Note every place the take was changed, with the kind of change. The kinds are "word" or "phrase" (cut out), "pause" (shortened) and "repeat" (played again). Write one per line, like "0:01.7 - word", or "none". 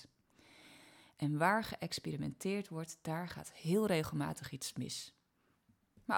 none